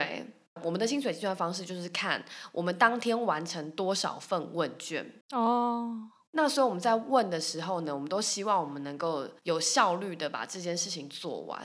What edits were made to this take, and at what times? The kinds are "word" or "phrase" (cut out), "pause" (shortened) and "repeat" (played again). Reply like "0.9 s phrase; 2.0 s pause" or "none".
5.2 s pause; 9.4 s pause